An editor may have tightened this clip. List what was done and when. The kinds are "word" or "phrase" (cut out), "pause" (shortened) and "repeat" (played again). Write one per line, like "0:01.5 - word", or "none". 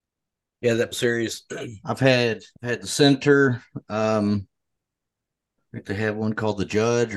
0:00.9 - word
0:01.8 - word
0:02.5 - pause